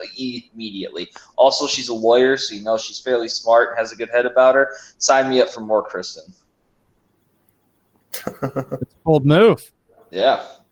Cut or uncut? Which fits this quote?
uncut